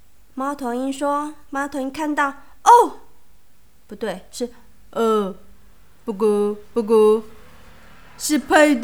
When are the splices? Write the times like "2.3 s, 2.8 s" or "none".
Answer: none